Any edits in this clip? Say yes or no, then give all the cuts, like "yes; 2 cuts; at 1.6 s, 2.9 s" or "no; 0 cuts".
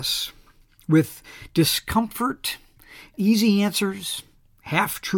yes; 1 cut; at 3.1 s